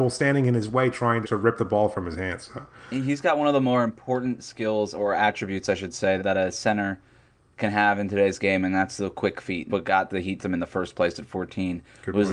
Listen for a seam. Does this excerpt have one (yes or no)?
yes